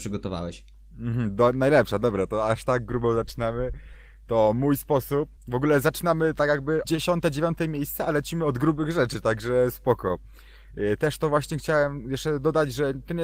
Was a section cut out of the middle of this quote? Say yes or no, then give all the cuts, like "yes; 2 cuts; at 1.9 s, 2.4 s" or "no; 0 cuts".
yes; 2 cuts; at 5.4 s, 6.8 s